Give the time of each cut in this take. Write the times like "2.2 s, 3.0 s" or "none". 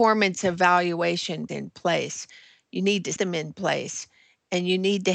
1.5 s, 3.2 s